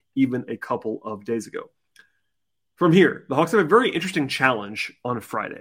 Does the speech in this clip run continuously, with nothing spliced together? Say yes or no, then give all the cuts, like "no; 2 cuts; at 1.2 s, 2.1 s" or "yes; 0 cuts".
yes; 0 cuts